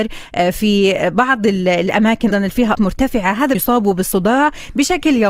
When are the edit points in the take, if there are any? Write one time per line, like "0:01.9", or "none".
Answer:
0:02.3
0:02.7
0:03.5